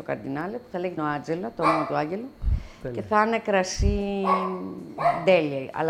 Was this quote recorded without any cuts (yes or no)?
no